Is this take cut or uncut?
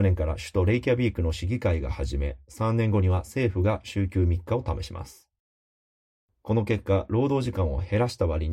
uncut